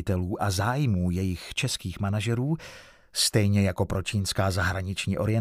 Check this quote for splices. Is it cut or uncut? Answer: uncut